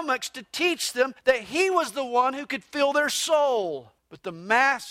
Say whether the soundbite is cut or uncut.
cut